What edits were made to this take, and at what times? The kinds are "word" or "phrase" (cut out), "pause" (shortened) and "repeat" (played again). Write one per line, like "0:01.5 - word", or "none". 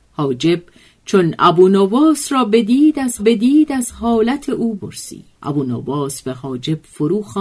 0:03.2 - repeat
0:04.8 - word
0:05.3 - pause